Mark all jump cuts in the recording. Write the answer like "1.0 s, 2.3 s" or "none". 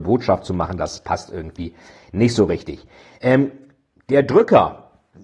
none